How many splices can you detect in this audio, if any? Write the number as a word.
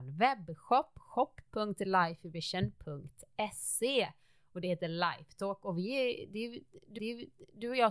one